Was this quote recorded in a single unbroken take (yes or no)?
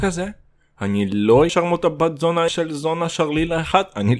no